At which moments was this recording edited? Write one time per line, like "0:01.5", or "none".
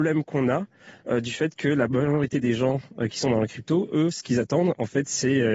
none